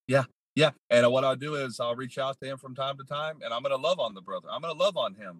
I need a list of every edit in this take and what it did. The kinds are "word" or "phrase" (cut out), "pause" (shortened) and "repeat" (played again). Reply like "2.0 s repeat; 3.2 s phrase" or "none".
none